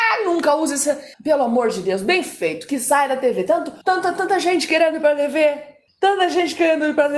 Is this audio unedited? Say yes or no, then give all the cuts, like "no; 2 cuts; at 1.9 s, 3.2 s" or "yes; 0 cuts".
no; 3 cuts; at 1.1 s, 3.8 s, 5.9 s